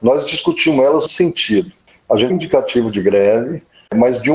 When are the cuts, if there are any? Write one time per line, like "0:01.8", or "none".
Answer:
0:01.1
0:02.3